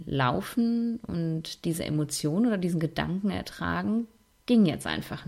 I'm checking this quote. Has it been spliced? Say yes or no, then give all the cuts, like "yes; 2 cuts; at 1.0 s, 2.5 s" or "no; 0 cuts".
no; 0 cuts